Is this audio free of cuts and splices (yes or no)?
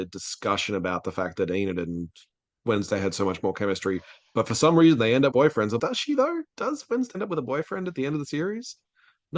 no